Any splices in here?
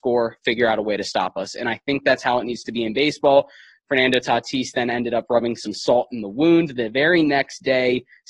no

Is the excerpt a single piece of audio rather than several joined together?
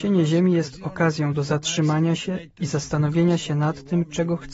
yes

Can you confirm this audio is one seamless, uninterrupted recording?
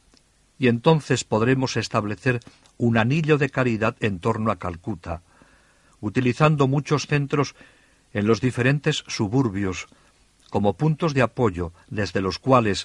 yes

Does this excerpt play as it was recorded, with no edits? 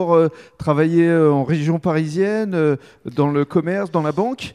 yes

